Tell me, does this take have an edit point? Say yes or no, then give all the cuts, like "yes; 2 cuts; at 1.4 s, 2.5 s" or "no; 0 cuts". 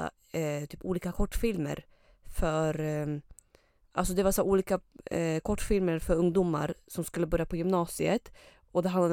no; 0 cuts